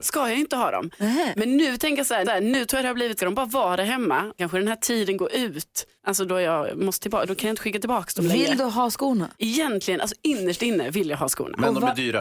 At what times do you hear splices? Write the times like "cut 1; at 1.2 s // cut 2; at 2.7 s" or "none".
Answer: cut 1; at 2.2 s // cut 2; at 3.2 s // cut 3; at 4.4 s // cut 4; at 6.0 s // cut 5; at 7.0 s // cut 6; at 9.3 s

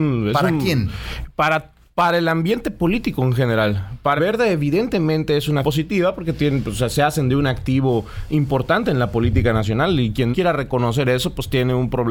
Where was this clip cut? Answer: cut 1; at 4.2 s // cut 2; at 5.6 s // cut 3; at 10.3 s

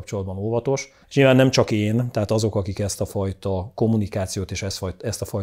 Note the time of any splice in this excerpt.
cut 1; at 1.0 s

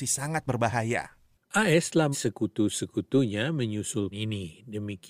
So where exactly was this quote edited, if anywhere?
cut 1; at 2.1 s // cut 2; at 4.1 s

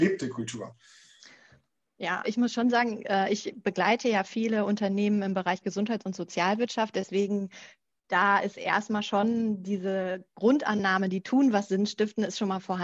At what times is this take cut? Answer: cut 1; at 2.2 s

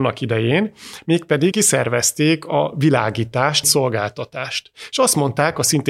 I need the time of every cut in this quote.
cut 1; at 1.5 s // cut 2; at 3.6 s

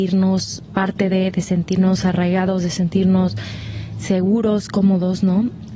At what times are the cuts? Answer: none

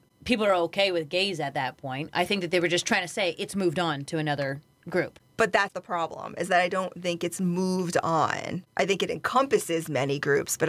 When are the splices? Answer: none

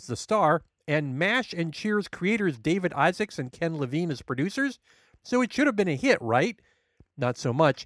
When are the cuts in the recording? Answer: none

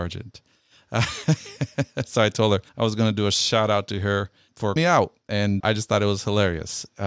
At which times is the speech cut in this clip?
cut 1; at 2.7 s // cut 2; at 4.8 s // cut 3; at 5.6 s

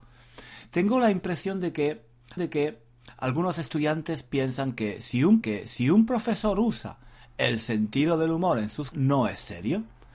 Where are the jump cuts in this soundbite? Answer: cut 1; at 2.4 s // cut 2; at 5.4 s // cut 3; at 8.9 s

